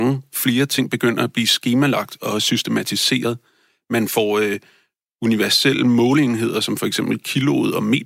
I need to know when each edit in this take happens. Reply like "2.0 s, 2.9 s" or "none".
none